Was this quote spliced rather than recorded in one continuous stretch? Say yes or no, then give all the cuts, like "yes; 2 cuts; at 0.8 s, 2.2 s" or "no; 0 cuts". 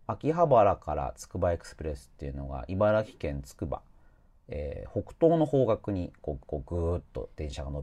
yes; 1 cut; at 6.4 s